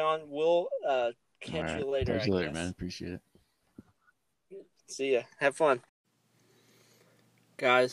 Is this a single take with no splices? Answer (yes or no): yes